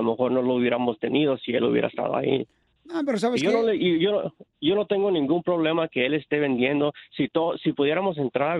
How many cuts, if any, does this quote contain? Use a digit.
0